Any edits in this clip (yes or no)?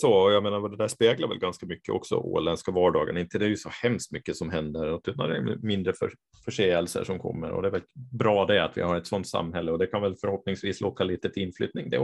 no